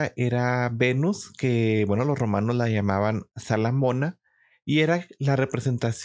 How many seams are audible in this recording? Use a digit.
0